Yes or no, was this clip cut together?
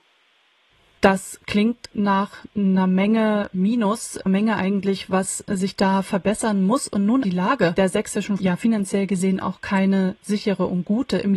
yes